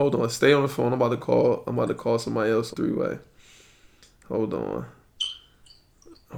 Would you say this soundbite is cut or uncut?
cut